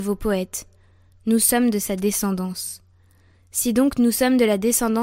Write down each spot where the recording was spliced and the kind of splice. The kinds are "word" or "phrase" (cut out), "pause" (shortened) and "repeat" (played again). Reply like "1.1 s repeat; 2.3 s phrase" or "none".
none